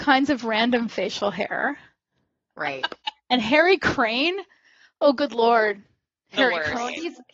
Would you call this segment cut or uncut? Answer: uncut